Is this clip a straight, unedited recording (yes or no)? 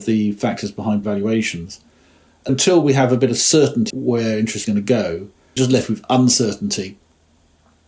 no